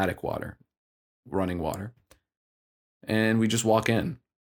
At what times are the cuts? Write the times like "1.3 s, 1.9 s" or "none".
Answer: none